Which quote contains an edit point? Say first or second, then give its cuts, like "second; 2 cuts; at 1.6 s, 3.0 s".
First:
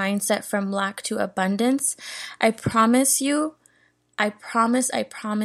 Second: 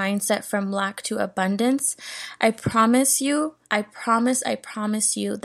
second; 1 cut; at 3.6 s